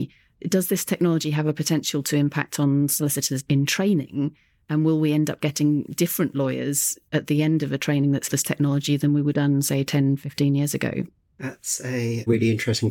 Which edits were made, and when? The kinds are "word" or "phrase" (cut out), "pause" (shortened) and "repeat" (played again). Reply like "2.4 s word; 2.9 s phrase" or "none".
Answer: 8.3 s word; 9.3 s word